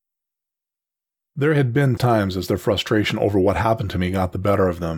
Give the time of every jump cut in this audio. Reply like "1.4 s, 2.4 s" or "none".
2.0 s